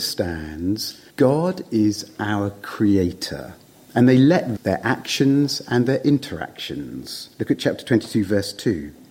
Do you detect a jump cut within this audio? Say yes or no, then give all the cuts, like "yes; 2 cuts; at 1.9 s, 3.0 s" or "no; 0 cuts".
yes; 3 cuts; at 1.1 s, 3.7 s, 4.6 s